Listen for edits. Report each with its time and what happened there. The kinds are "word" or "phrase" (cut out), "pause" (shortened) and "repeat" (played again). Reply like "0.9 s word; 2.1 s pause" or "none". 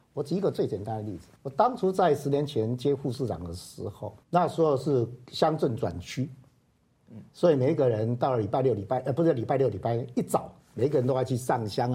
1.4 s pause; 4.2 s pause